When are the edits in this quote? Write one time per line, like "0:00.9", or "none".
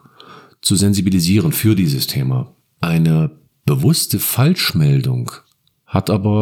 none